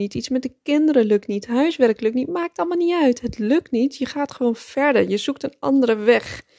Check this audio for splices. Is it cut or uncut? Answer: uncut